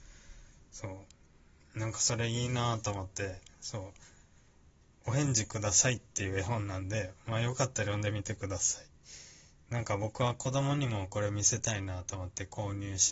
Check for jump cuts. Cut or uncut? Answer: uncut